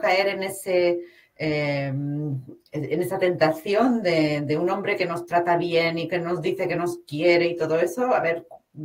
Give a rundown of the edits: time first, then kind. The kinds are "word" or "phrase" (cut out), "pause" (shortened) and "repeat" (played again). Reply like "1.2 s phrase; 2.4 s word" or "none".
none